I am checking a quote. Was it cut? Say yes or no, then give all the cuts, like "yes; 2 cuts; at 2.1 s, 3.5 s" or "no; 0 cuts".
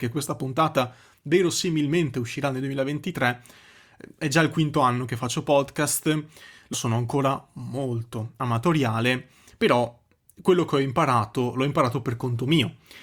yes; 1 cut; at 6.7 s